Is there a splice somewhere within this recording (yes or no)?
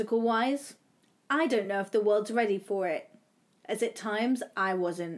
no